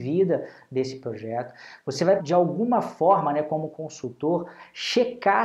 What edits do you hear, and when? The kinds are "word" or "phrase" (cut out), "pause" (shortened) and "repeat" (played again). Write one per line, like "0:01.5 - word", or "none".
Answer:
0:02.2 - word